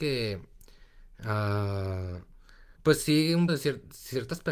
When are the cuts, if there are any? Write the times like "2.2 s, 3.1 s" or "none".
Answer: 2.7 s, 3.5 s